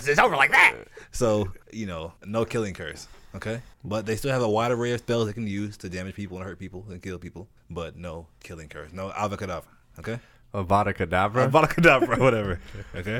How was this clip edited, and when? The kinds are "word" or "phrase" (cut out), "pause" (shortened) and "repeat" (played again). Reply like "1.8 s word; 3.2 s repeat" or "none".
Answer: 1.6 s pause; 2.2 s pause; 3.7 s pause; 7.6 s pause